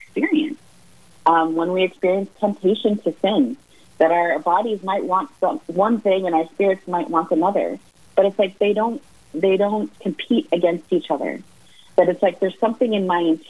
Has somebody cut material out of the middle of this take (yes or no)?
no